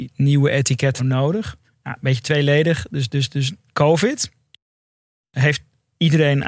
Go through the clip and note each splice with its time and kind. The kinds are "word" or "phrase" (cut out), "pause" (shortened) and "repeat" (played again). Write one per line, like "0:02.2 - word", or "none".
0:01.0 - word
0:01.6 - pause